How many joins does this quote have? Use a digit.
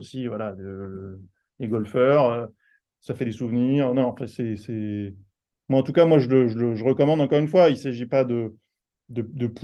0